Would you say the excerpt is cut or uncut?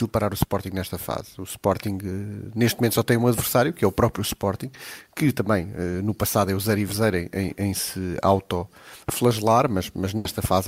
uncut